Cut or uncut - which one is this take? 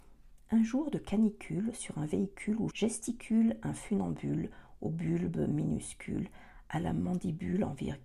cut